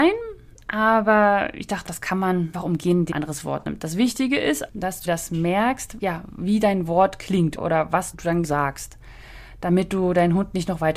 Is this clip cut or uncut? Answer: cut